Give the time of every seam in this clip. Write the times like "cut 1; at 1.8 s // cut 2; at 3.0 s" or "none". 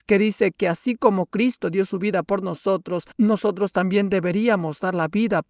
cut 1; at 3.1 s